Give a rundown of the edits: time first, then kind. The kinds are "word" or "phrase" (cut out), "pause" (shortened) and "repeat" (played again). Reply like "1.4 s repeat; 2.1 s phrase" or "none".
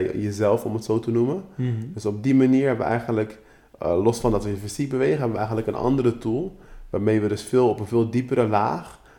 none